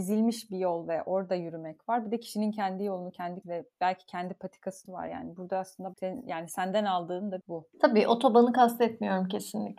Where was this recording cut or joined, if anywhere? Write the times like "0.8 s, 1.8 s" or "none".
3.4 s, 4.9 s, 5.9 s, 7.4 s